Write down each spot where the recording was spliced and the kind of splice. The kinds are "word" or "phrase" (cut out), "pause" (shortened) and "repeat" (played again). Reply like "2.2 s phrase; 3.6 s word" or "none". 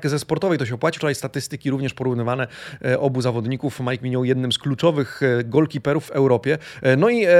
1.0 s word; 6.0 s phrase